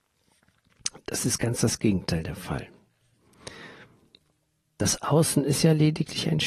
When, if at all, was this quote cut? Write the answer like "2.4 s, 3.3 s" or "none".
none

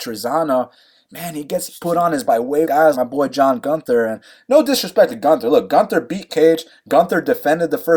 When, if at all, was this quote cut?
2.3 s, 2.6 s, 2.9 s, 6.3 s

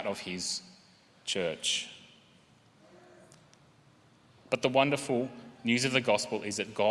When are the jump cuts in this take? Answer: none

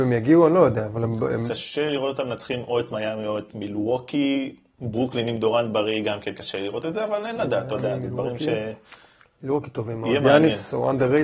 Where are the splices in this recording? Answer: none

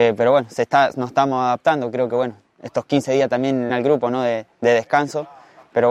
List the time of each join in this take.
3.7 s

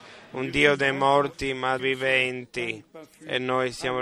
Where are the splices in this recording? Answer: 1.8 s

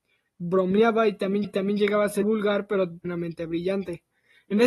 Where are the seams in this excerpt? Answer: 1.4 s, 2.2 s, 3.0 s

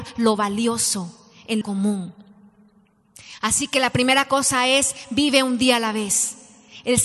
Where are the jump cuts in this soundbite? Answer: 1.6 s

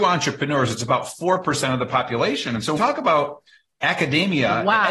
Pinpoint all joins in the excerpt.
2.8 s

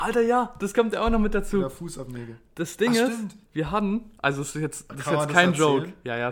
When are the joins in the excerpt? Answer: 3.5 s

